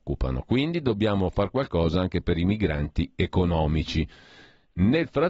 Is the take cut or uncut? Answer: uncut